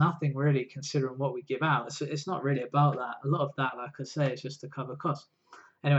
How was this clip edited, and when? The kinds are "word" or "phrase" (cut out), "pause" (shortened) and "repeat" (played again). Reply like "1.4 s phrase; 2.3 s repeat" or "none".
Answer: none